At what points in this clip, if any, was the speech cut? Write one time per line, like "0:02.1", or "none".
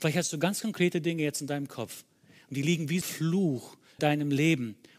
0:03.0
0:04.0